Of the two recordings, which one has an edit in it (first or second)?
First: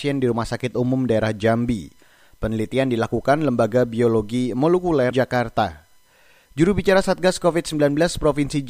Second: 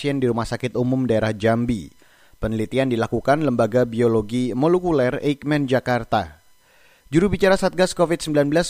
first